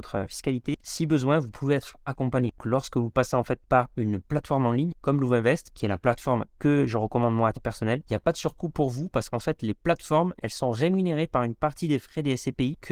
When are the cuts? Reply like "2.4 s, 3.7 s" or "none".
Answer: 7.5 s